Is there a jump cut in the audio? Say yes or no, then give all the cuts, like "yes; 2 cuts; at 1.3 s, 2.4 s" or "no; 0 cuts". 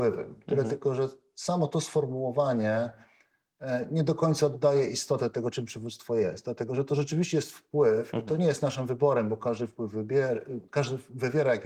no; 0 cuts